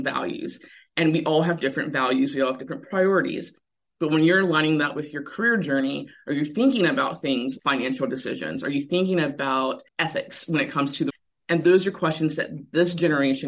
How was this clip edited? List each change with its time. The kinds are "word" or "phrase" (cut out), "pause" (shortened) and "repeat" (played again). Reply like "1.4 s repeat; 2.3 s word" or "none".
7.6 s word; 9.9 s pause; 11.1 s word